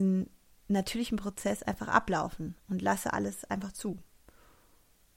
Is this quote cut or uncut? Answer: uncut